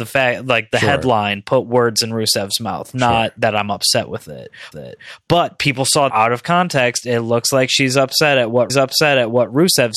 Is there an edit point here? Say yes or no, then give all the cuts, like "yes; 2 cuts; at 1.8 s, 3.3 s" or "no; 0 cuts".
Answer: yes; 3 cuts; at 4.7 s, 6.1 s, 8.7 s